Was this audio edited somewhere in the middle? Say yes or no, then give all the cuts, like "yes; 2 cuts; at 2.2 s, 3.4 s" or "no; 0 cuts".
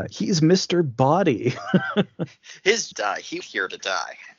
yes; 2 cuts; at 2.9 s, 3.4 s